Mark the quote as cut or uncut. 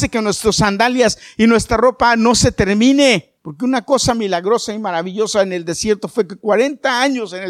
cut